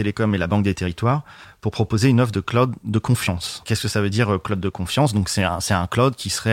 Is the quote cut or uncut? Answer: uncut